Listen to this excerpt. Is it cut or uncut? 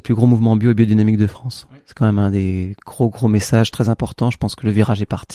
uncut